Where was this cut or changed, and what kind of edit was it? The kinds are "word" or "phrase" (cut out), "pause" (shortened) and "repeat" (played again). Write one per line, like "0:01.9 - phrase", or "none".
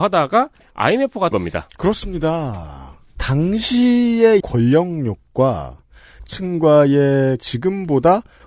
0:01.3 - phrase
0:04.4 - word
0:07.4 - word